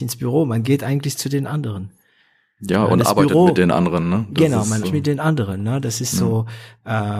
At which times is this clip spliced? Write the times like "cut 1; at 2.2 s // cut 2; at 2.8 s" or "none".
cut 1; at 4.8 s